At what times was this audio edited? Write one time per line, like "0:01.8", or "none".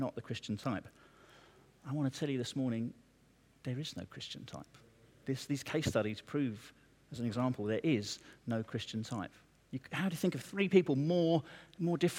none